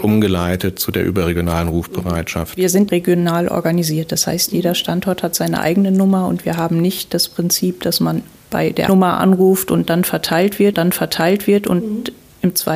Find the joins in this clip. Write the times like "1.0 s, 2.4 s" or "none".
2.9 s, 8.9 s, 10.7 s